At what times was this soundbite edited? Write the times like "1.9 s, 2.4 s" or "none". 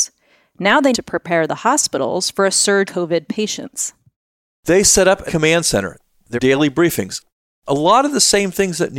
0.9 s, 2.9 s, 5.3 s, 6.4 s